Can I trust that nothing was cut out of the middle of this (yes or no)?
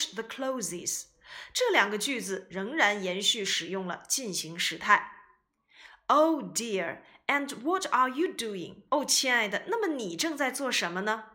no